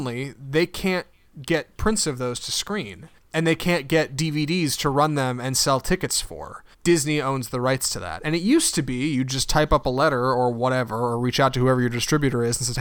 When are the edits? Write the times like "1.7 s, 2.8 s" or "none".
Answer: 3.2 s, 6.7 s

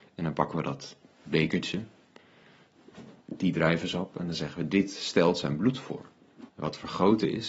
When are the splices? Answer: 3.2 s, 6.5 s

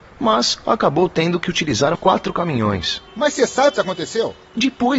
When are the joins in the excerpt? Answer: 1.9 s, 3.1 s, 3.8 s

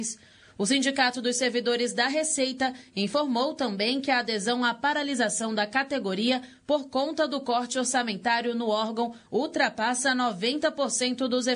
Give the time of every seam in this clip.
none

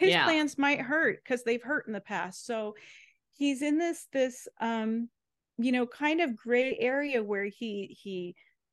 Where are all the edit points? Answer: none

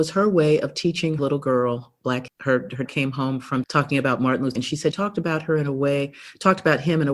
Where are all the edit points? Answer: 1.2 s, 2.3 s, 2.9 s, 3.6 s, 4.6 s, 4.9 s

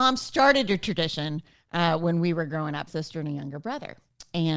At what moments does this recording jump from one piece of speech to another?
2.9 s

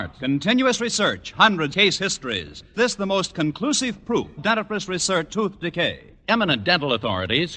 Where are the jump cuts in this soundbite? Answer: 1.7 s, 2.7 s, 4.4 s, 5.3 s

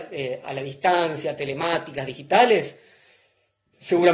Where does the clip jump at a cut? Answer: none

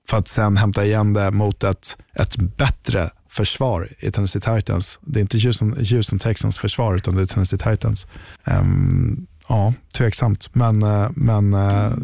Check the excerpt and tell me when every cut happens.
2.0 s, 8.4 s

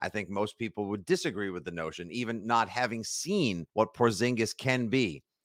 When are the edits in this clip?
3.7 s

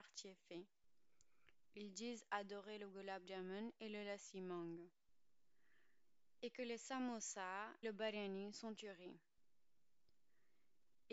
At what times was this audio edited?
7.8 s, 8.7 s

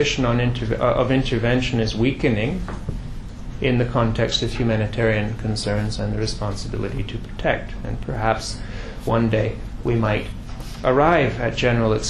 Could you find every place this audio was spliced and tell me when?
none

